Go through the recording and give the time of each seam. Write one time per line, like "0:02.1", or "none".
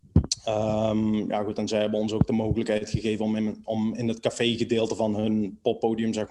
none